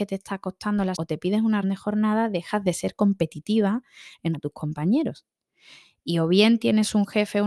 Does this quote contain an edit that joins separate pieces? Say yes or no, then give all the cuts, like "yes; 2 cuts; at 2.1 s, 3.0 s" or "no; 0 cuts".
yes; 3 cuts; at 1.0 s, 1.6 s, 4.3 s